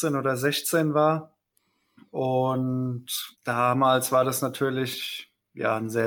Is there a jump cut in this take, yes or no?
yes